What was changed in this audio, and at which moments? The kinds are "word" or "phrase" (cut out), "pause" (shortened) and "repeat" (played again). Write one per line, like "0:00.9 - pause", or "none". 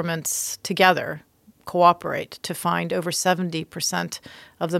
none